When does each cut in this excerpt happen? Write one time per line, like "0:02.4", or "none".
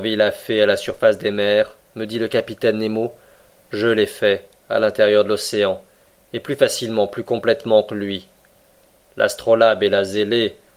none